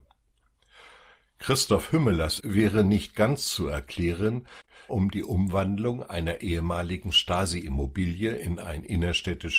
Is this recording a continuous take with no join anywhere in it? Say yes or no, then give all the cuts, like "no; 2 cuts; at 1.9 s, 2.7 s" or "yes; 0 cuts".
no; 2 cuts; at 2.4 s, 4.9 s